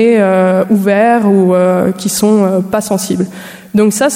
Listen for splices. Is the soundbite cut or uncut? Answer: uncut